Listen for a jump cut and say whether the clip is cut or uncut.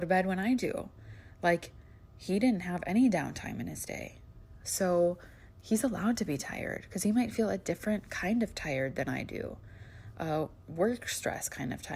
uncut